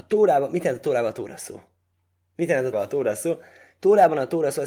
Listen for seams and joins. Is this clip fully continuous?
no; 1 cut; at 2.7 s

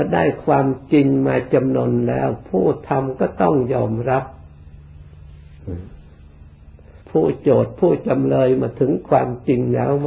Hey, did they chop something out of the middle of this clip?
yes; 1 cut; at 7.0 s

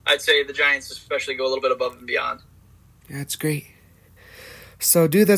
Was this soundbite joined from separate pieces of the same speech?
no; 0 cuts

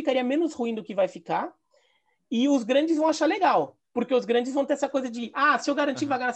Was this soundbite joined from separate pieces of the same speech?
no; 0 cuts

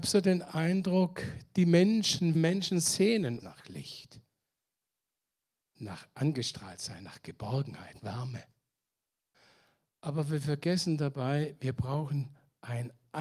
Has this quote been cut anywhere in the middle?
yes; 3 cuts; at 2.3 s, 3.4 s, 8.0 s

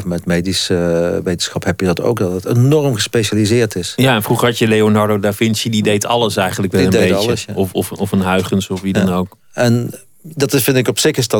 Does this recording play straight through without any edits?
yes; 0 cuts

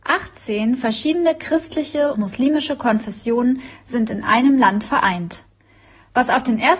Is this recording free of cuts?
no; 1 cut; at 2.1 s

